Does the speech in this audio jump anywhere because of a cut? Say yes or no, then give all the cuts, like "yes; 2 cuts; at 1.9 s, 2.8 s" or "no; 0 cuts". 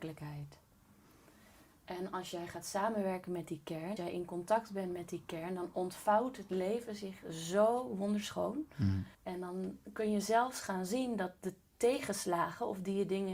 yes; 2 cuts; at 4.0 s, 9.1 s